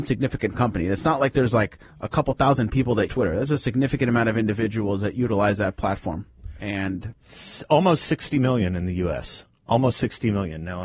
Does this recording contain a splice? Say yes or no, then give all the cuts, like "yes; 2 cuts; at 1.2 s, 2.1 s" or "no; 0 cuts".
yes; 2 cuts; at 3.1 s, 7.2 s